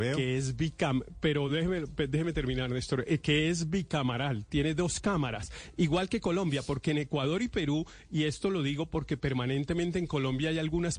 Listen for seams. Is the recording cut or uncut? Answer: uncut